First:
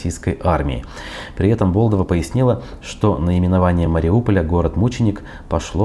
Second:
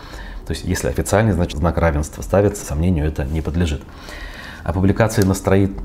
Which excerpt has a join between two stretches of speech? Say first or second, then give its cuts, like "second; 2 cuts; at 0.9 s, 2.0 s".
second; 2 cuts; at 1.5 s, 2.6 s